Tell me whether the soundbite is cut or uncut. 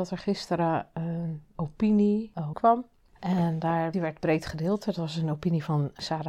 cut